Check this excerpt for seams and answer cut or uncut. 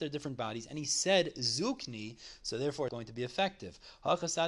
cut